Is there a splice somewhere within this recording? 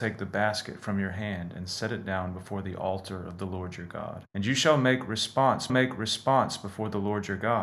yes; 2 cuts; at 4.3 s, 5.7 s

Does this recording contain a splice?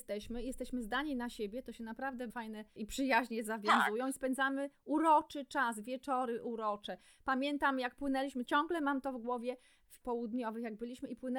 yes; 4 cuts; at 2.3 s, 2.8 s, 8.4 s, 10.0 s

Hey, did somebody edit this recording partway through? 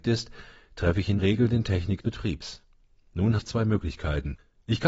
yes; 3 cuts; at 1.2 s, 2.0 s, 3.4 s

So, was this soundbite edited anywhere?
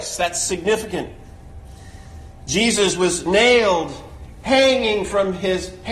no; 0 cuts

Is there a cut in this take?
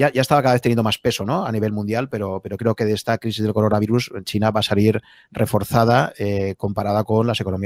no; 0 cuts

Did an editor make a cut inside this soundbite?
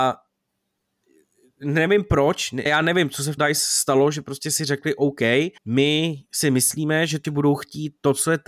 yes; 4 cuts; at 2.7 s, 3.4 s, 5.6 s, 7.2 s

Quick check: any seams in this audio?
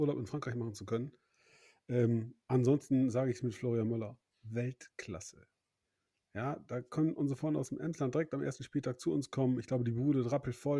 no; 0 cuts

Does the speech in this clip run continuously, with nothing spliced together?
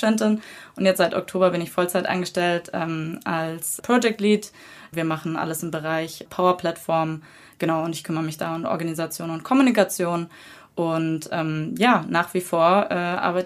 yes; 0 cuts

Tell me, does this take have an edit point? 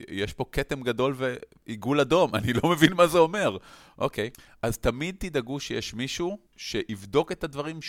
yes; 2 cuts; at 4.3 s, 6.5 s

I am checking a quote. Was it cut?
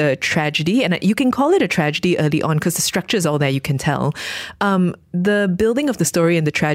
no; 0 cuts

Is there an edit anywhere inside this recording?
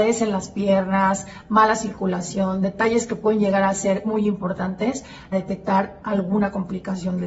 yes; 2 cuts; at 4.0 s, 5.3 s

